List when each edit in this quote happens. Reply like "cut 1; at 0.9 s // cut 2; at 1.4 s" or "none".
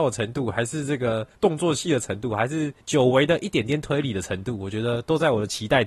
cut 1; at 1.3 s // cut 2; at 2.8 s